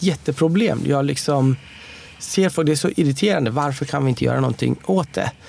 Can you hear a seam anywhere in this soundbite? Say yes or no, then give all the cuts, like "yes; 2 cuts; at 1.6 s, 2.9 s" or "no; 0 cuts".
no; 0 cuts